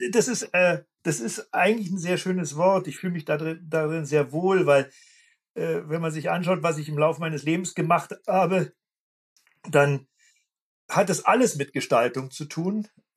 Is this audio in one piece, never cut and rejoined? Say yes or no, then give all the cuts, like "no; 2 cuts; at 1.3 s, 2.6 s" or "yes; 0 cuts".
yes; 0 cuts